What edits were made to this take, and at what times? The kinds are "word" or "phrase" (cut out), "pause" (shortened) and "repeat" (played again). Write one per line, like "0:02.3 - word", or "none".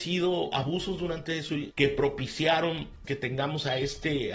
0:01.7 - phrase
0:03.0 - word